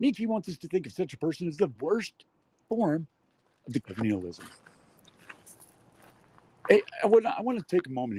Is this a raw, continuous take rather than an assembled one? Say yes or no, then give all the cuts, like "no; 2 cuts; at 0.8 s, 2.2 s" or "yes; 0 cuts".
no; 2 cuts; at 1.8 s, 3.8 s